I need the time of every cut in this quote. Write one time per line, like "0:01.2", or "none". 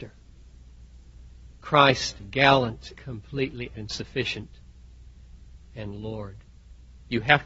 0:01.6
0:02.2
0:03.0
0:03.7
0:05.6